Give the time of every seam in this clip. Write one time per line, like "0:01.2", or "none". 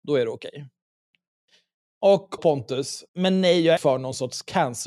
0:02.4
0:03.1
0:03.8

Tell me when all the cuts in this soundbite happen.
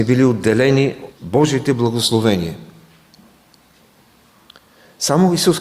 0:01.1

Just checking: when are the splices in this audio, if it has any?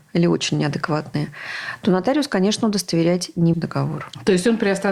0:03.5

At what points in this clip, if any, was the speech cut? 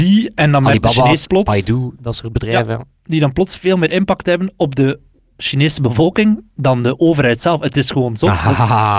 0:01.2
0:05.2

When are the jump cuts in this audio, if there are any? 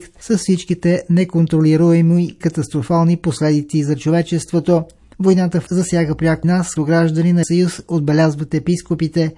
0:02.4
0:05.7
0:06.4
0:06.8
0:07.4

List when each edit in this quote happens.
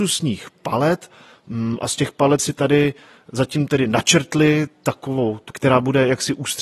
0:02.4
0:05.5

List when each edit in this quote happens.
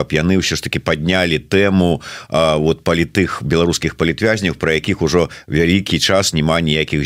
none

